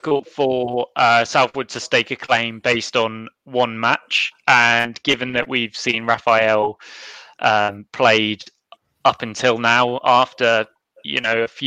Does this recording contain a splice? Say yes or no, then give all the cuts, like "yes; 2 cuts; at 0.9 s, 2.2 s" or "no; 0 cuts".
no; 0 cuts